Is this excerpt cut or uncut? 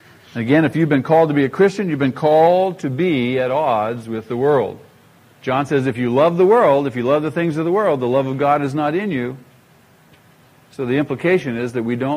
cut